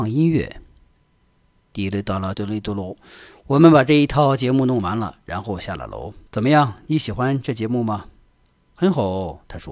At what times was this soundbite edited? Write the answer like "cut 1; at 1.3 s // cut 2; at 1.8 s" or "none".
cut 1; at 2.3 s // cut 2; at 6.3 s